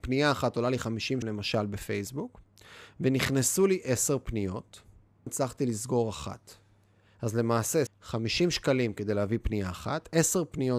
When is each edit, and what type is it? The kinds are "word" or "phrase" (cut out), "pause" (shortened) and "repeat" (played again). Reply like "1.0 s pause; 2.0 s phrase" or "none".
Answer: 1.2 s word; 5.3 s word; 7.9 s word